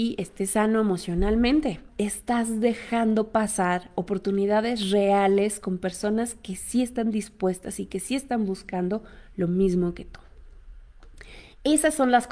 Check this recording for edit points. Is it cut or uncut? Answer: cut